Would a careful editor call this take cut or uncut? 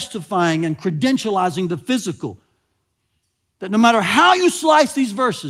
uncut